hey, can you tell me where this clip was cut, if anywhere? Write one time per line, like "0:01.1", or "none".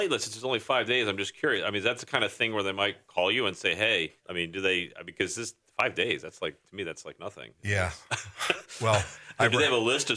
0:04.2